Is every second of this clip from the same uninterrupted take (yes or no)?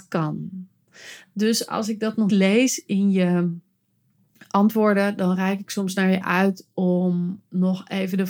no